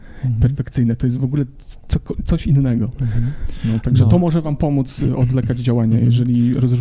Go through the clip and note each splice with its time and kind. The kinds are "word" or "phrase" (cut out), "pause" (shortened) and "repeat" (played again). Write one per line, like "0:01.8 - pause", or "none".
none